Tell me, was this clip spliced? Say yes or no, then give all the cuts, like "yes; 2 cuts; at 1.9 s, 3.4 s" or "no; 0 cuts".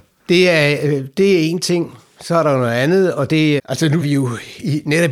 yes; 2 cuts; at 3.6 s, 4.0 s